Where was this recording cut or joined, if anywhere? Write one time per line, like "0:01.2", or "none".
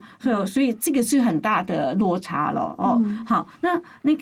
none